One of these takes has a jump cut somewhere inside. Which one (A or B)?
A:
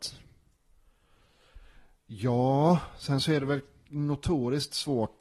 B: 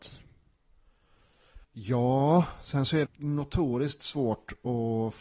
B